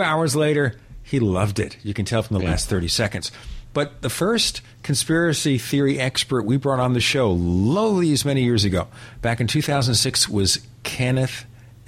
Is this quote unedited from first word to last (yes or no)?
yes